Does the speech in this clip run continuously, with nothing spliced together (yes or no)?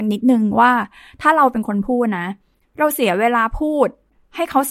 yes